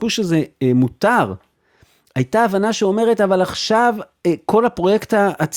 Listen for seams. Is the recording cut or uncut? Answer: uncut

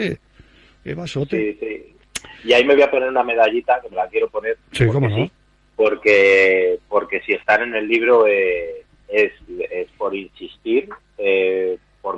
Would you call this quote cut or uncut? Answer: uncut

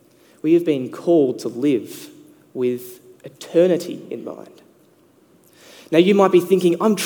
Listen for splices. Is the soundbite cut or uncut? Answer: uncut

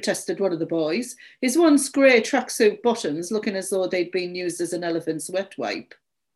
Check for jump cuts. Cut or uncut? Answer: uncut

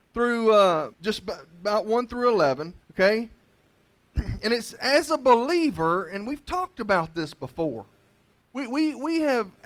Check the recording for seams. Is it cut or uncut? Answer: cut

